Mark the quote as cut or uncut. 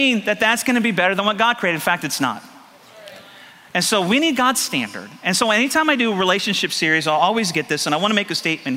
uncut